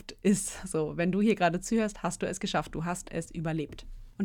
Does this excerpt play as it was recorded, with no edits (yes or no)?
yes